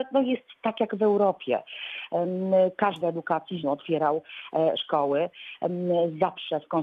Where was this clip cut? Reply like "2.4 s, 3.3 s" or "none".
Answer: 3.0 s, 3.6 s